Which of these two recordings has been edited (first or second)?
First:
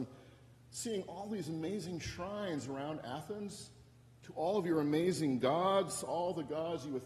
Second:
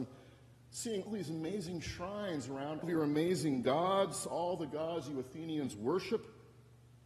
second